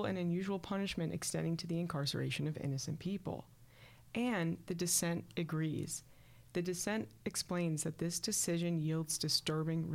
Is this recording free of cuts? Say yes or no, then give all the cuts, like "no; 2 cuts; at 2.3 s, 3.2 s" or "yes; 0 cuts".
yes; 0 cuts